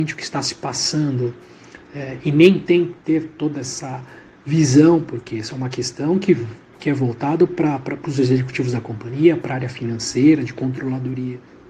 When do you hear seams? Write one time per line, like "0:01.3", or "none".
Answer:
none